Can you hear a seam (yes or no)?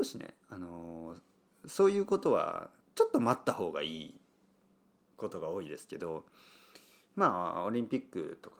yes